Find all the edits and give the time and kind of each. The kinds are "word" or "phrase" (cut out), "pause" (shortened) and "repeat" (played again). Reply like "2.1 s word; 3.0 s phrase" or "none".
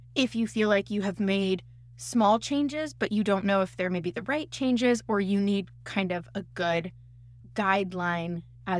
none